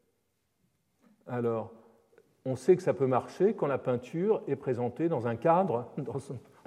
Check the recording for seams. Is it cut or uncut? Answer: uncut